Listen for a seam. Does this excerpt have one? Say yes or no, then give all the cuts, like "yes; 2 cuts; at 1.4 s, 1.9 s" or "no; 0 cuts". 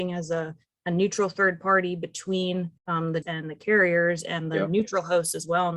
yes; 2 cuts; at 2.8 s, 3.2 s